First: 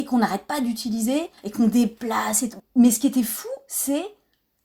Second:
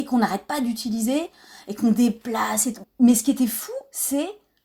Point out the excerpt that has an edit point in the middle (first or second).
first